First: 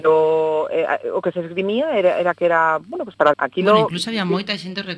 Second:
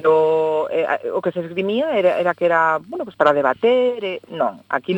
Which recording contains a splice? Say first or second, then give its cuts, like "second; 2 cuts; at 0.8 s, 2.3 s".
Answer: first; 1 cut; at 3.3 s